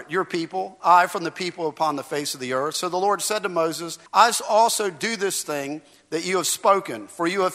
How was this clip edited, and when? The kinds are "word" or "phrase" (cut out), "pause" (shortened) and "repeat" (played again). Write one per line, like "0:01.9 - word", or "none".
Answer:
0:04.1 - pause